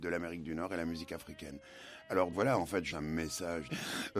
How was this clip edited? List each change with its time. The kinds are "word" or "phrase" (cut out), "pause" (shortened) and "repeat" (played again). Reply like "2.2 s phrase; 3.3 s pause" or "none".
2.3 s word; 2.9 s word